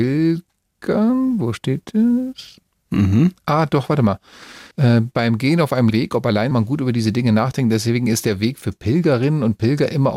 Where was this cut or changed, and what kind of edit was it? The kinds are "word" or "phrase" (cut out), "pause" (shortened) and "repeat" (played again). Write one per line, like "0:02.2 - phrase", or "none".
0:04.7 - pause
0:05.9 - word
0:06.5 - phrase